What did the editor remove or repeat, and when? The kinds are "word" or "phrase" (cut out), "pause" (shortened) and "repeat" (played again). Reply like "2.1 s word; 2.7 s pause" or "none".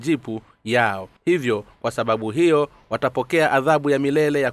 1.2 s pause

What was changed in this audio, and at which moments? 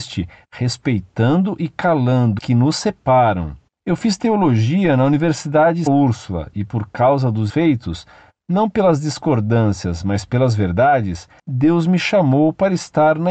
2.4 s word; 5.9 s word; 7.5 s word

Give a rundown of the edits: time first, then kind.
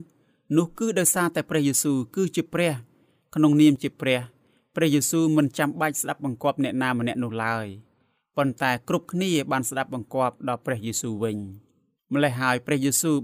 none

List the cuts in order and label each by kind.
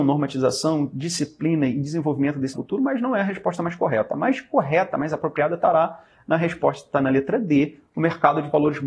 2.5 s word

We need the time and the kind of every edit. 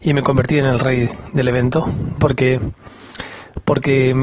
2.2 s word

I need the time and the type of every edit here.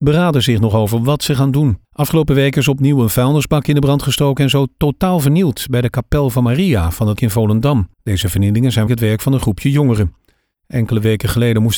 1.8 s pause; 7.2 s phrase; 7.9 s pause; 8.9 s word

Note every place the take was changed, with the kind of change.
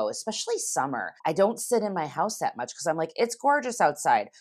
1.2 s pause

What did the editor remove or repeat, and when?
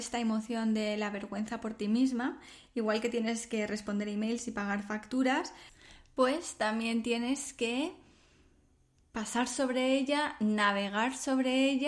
none

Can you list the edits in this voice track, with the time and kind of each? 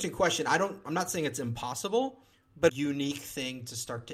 2.3 s pause; 2.7 s phrase

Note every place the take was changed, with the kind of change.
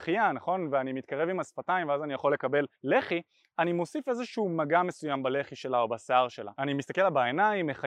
2.7 s pause

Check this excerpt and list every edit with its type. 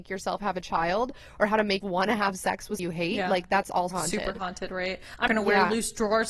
1.8 s word; 2.8 s word; 3.9 s word; 5.3 s word

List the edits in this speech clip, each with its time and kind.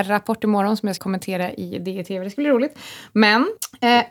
1.0 s word

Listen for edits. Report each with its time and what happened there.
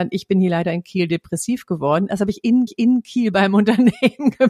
2.7 s repeat

